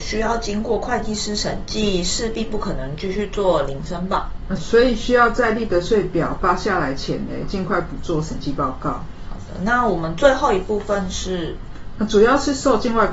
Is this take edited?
yes; 1 cut; at 4.6 s

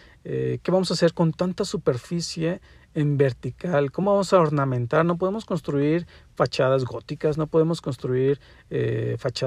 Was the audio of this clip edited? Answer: no; 0 cuts

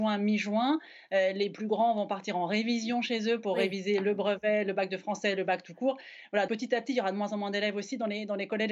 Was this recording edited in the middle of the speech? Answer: yes; 1 cut; at 6.5 s

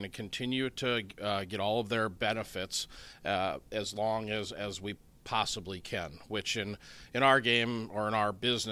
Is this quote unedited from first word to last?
yes; 0 cuts

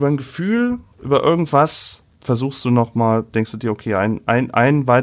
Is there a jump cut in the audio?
yes; 2 cuts; at 0.9 s, 2.1 s

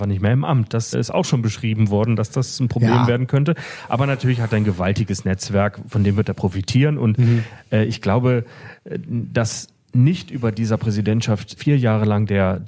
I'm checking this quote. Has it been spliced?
yes; 2 cuts; at 0.9 s, 11.6 s

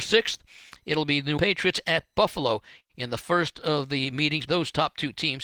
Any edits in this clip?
yes; 2 cuts; at 1.4 s, 4.5 s

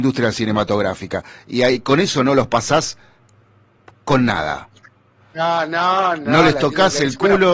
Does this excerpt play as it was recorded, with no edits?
yes; 0 cuts

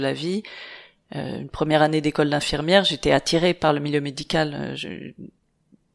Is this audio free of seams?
yes; 0 cuts

